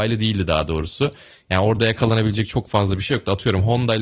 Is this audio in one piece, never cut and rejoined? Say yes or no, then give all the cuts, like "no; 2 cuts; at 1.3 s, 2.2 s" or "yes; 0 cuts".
yes; 0 cuts